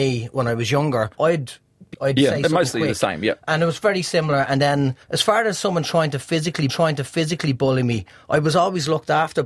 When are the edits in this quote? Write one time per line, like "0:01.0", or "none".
0:01.1
0:01.9
0:05.0
0:06.7